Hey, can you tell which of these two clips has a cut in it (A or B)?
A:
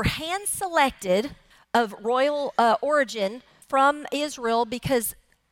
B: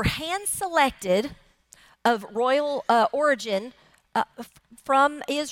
A